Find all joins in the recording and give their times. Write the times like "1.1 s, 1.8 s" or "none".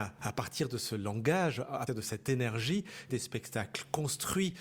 1.9 s, 3.1 s